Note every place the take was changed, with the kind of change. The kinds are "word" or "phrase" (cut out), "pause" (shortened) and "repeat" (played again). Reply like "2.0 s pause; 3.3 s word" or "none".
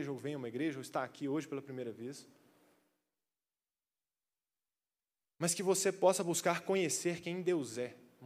none